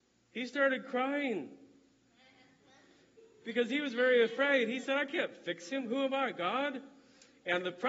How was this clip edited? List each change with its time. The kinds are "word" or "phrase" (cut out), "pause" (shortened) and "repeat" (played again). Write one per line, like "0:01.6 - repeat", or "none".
none